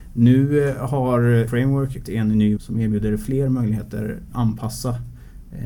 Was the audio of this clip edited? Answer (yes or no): yes